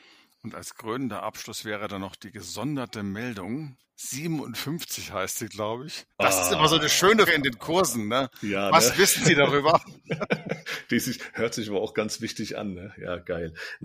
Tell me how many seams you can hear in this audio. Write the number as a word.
three